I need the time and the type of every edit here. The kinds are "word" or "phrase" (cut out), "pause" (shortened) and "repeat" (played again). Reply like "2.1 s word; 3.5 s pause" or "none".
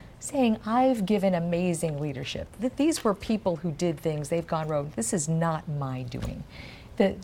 none